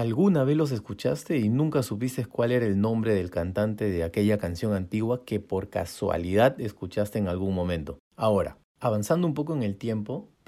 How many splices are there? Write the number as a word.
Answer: one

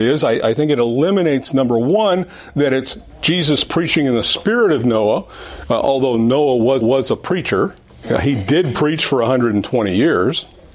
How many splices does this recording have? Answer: one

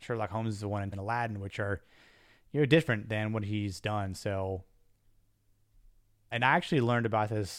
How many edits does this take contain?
two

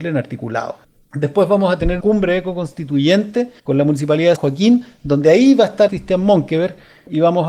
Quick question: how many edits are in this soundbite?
four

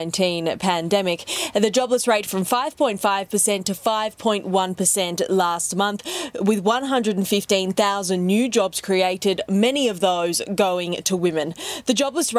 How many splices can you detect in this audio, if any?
one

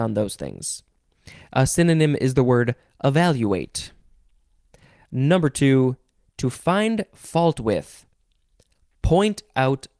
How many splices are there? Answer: zero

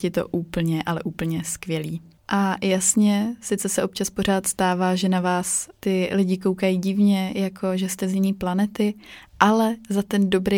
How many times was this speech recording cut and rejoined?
zero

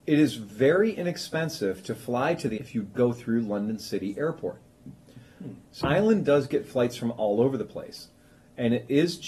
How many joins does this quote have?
three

